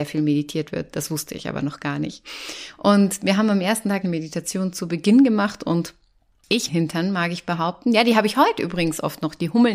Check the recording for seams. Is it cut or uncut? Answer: cut